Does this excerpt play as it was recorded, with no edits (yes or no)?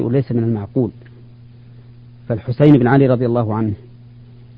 yes